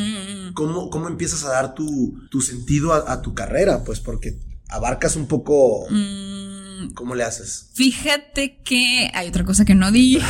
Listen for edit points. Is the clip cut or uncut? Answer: cut